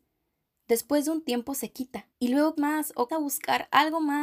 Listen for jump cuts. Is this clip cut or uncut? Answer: cut